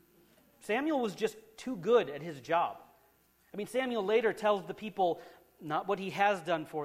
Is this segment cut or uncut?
uncut